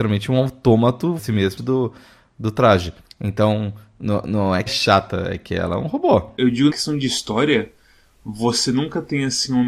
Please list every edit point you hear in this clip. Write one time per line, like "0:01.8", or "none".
0:01.2
0:01.6
0:03.0
0:04.7
0:06.7